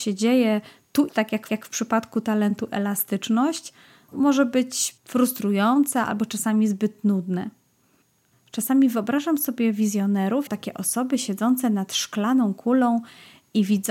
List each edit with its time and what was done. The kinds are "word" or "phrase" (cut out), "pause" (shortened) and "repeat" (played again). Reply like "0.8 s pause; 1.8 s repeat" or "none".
1.1 s phrase; 1.5 s repeat; 4.1 s word; 5.0 s pause; 10.5 s word

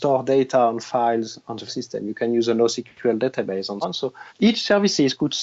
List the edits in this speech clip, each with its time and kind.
1.7 s word; 3.8 s word; 4.3 s pause

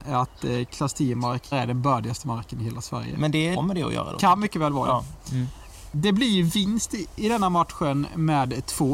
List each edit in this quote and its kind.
1.5 s word; 3.6 s phrase

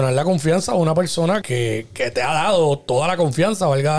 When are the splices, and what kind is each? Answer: 1.4 s word

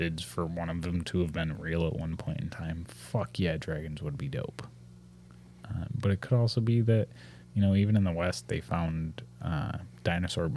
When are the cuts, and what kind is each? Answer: 7.4 s pause

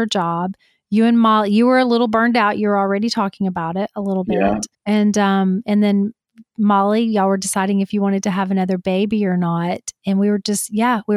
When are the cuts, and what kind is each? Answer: 4.7 s pause

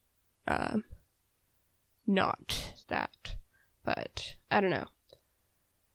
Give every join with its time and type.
2.8 s pause; 4.4 s pause

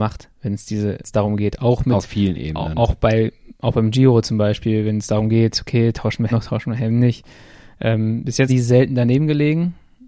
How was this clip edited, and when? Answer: 1.0 s word; 6.3 s word; 8.5 s word

